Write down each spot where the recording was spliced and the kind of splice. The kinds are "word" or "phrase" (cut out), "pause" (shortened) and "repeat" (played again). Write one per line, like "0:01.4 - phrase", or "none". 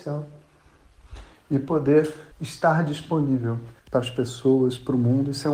0:02.3 - pause
0:03.8 - pause